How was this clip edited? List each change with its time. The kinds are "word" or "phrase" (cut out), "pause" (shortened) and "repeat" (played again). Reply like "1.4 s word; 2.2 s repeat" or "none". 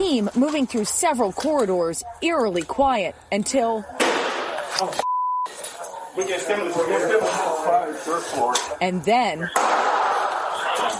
none